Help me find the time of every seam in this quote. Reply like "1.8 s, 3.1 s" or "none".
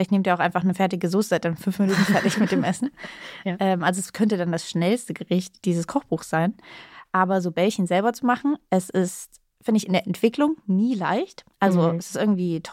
11.5 s